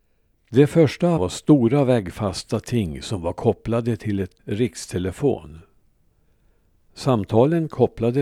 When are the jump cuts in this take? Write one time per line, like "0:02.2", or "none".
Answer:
0:01.2
0:04.4